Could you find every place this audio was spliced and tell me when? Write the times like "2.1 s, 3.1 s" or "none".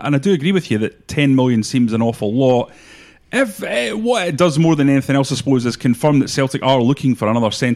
none